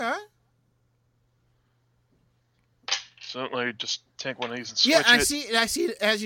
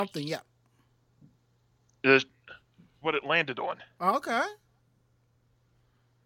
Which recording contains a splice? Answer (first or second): second